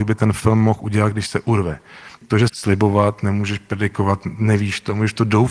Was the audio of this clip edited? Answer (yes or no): yes